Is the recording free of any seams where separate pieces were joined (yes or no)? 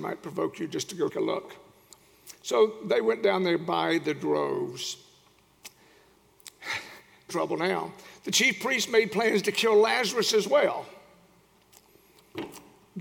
no